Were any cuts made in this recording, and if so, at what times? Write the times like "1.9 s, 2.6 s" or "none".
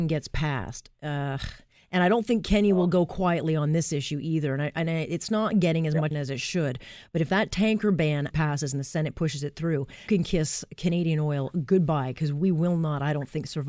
6.1 s, 8.3 s, 10.1 s